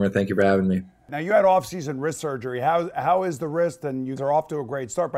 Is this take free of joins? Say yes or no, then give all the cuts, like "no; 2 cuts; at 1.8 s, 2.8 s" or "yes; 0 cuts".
no; 1 cut; at 4.2 s